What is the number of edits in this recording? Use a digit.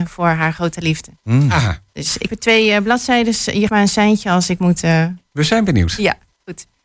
3